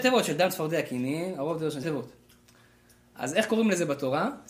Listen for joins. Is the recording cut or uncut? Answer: cut